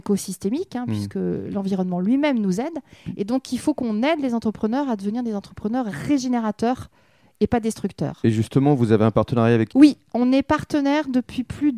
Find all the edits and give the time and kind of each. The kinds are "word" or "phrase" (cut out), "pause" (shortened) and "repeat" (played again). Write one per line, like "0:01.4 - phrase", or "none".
0:09.7 - phrase